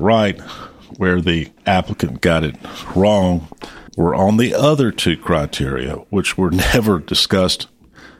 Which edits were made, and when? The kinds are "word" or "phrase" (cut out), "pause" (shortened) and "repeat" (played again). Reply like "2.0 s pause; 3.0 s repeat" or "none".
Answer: 1.6 s pause; 3.9 s pause

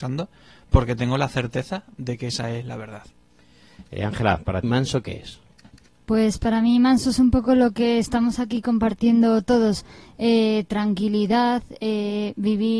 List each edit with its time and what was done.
4.6 s word

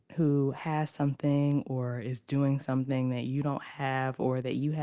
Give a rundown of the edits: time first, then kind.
none

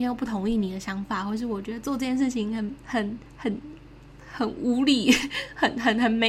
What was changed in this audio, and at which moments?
3.2 s pause

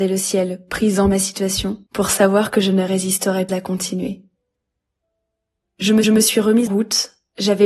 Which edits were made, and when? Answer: 1.9 s pause; 3.5 s word; 6.0 s repeat; 6.7 s word

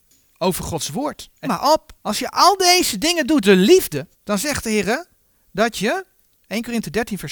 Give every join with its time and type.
1.4 s word; 2.0 s pause; 3.4 s word; 4.1 s pause

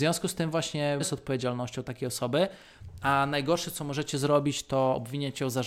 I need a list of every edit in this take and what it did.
1.0 s phrase

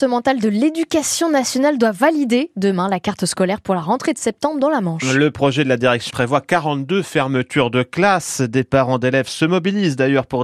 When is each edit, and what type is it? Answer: 6.1 s word

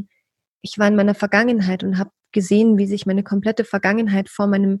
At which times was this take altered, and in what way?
none

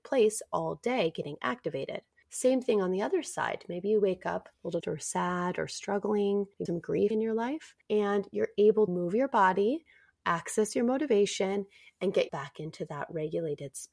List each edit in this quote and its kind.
4.8 s word; 6.7 s word; 7.1 s word; 8.9 s word; 12.3 s word

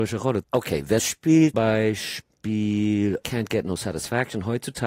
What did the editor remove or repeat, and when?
1.0 s word; 1.5 s word

